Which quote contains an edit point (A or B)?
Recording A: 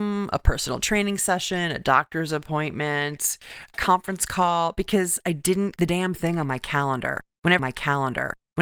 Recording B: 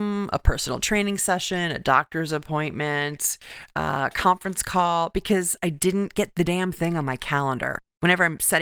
A